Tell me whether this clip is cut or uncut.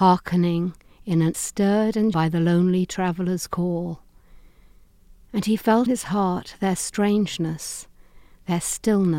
cut